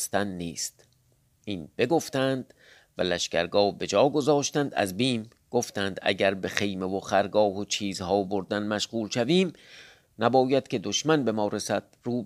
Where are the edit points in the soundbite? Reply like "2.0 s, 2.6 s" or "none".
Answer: none